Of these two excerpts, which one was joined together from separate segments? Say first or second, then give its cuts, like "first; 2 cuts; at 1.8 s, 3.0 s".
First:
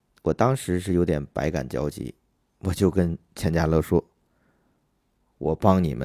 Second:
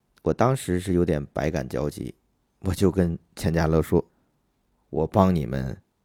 second; 1 cut; at 4.1 s